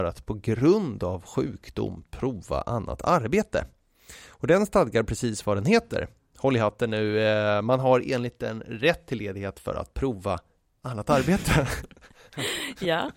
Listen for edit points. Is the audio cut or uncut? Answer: uncut